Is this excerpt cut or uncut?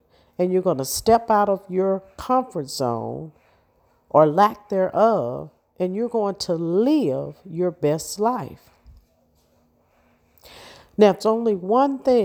cut